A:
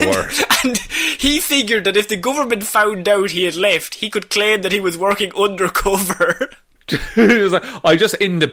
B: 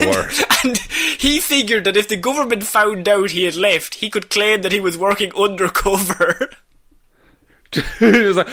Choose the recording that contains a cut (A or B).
A